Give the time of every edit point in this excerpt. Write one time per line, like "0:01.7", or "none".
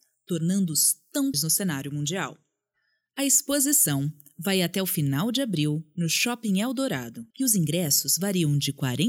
0:01.3
0:07.3